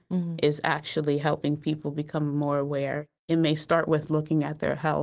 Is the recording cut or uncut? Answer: cut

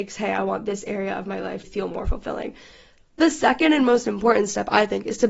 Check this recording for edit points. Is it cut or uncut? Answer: cut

